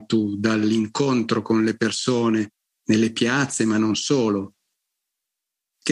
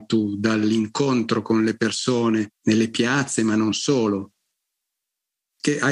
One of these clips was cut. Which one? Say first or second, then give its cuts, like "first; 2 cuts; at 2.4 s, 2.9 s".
second; 1 cut; at 2.6 s